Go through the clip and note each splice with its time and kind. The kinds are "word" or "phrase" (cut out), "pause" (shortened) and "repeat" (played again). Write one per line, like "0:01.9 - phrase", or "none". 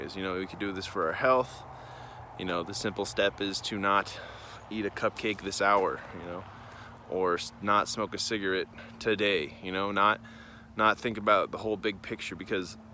none